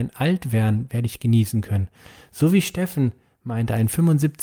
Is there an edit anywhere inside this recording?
no; 0 cuts

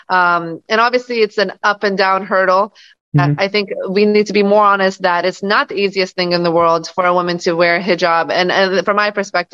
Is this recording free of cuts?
yes; 0 cuts

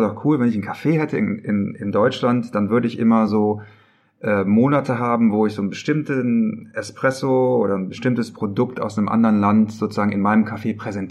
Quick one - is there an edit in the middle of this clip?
no; 0 cuts

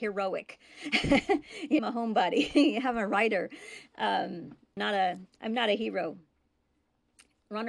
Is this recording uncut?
no; 2 cuts; at 1.8 s, 4.8 s

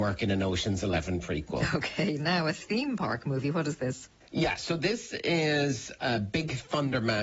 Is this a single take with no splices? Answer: yes; 0 cuts

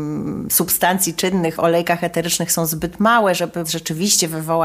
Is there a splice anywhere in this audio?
yes; 2 cuts; at 1.6 s, 3.6 s

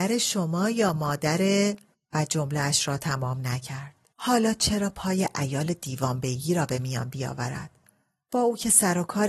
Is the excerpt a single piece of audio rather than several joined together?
no; 2 cuts; at 1.9 s, 4.1 s

